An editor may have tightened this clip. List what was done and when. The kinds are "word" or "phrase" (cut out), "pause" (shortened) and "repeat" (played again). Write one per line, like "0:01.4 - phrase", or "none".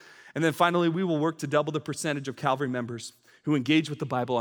none